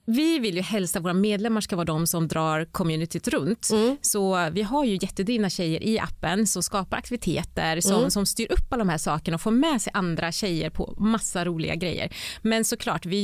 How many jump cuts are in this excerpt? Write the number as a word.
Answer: zero